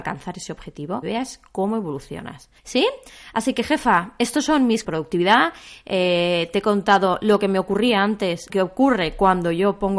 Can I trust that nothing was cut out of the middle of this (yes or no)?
no